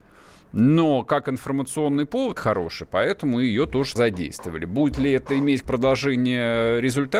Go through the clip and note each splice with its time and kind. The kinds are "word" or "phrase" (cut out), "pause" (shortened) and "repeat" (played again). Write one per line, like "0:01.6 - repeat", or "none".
0:02.4 - word
0:04.0 - word
0:05.6 - word